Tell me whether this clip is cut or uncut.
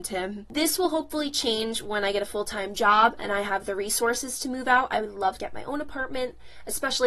cut